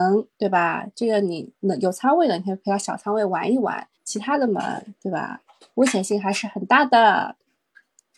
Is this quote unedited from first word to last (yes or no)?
no